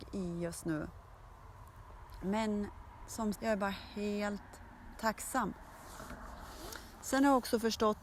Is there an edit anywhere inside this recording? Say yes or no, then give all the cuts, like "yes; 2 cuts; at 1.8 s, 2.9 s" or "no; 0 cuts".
yes; 2 cuts; at 3.3 s, 4.9 s